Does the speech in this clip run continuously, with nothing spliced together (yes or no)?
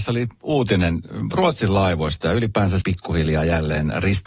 no